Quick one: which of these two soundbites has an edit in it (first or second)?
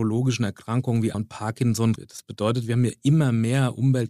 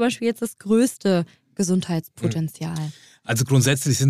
first